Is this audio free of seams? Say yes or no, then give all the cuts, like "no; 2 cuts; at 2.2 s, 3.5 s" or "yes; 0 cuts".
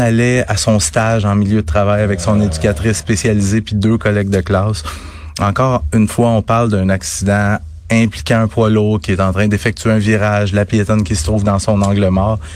yes; 0 cuts